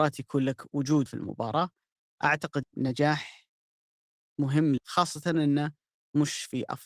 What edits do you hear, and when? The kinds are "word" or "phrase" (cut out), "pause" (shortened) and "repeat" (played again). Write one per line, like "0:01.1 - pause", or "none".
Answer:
0:01.1 - word
0:02.6 - word
0:04.8 - word